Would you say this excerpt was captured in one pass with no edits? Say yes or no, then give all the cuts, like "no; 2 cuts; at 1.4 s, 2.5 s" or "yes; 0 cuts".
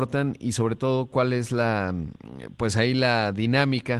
yes; 0 cuts